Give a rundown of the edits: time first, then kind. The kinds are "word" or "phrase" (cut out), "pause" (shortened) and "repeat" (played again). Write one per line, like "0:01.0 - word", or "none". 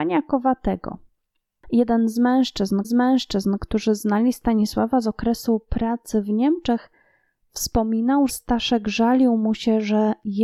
0:02.8 - repeat
0:08.3 - word